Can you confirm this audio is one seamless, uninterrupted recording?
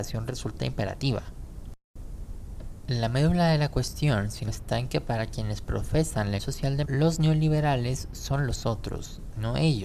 no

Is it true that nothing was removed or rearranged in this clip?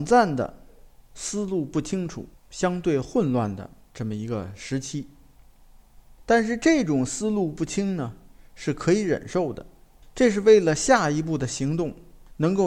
no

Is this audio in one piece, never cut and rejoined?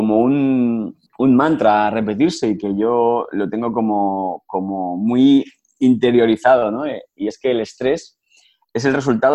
no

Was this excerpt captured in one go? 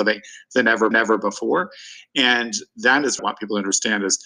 no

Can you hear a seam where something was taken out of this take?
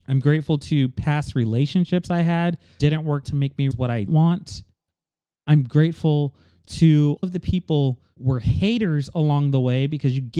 yes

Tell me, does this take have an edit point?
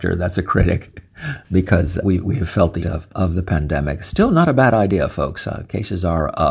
yes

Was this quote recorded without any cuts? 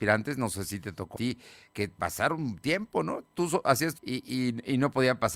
no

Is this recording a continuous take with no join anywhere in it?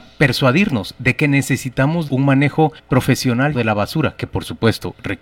no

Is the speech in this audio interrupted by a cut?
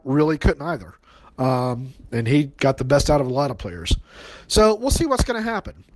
no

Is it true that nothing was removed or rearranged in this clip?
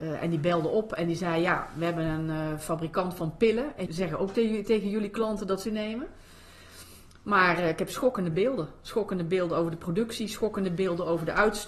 no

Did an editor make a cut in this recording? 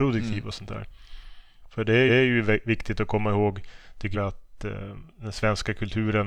yes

